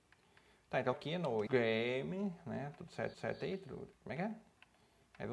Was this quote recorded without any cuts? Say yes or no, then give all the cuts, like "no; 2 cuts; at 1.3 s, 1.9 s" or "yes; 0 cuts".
no; 4 cuts; at 0.9 s, 1.5 s, 3.1 s, 3.9 s